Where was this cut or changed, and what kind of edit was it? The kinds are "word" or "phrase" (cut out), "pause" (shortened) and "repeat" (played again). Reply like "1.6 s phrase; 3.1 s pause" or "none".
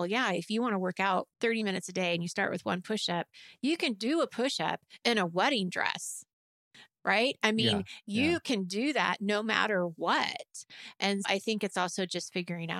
1.3 s pause; 11.2 s word

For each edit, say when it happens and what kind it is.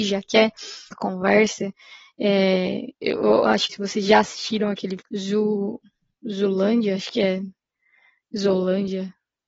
0.9 s word; 2.9 s pause; 3.7 s phrase; 5.0 s word

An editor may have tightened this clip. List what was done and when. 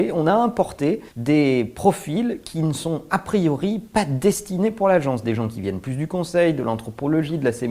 1.1 s pause

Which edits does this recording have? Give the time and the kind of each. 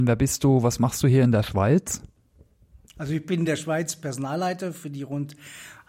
none

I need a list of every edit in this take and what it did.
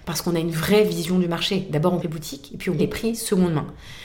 2.0 s phrase; 2.8 s word

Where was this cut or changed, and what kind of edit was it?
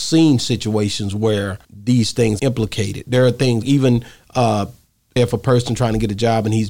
1.6 s pause; 2.4 s phrase; 3.6 s word; 5.2 s word

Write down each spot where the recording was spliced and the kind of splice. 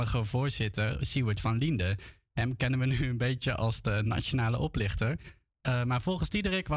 none

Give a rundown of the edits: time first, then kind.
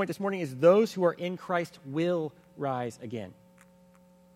none

